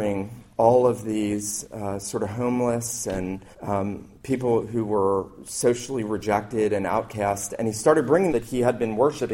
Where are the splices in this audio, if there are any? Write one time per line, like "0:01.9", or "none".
0:03.5
0:08.3